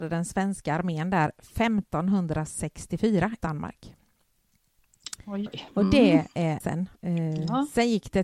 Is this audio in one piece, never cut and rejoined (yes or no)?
no